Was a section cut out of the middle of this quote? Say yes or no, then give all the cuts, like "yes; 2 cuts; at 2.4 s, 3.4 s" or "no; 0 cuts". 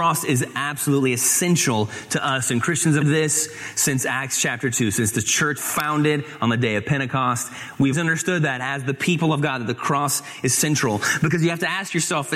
yes; 3 cuts; at 3.0 s, 5.6 s, 7.9 s